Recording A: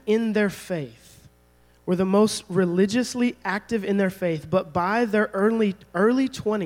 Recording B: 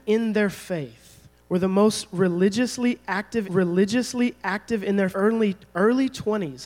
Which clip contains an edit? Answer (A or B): B